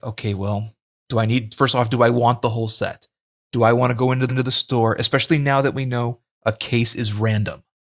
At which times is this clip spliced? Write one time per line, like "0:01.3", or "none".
0:04.3